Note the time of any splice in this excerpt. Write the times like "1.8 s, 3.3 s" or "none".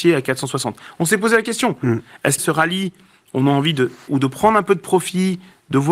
2.4 s, 4.1 s